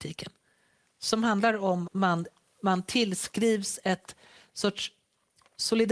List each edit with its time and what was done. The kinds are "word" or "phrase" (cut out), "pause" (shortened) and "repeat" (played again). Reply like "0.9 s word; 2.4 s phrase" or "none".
1.9 s word